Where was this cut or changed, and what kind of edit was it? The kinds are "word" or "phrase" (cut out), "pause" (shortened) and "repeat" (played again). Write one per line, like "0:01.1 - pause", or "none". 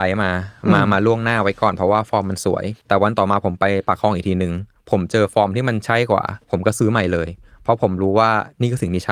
0:02.8 - pause
0:06.4 - pause